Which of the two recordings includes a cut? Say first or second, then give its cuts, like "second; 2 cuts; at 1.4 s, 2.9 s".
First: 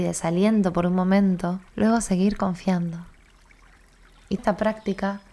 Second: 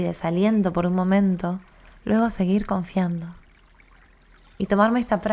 first; 2 cuts; at 1.7 s, 4.4 s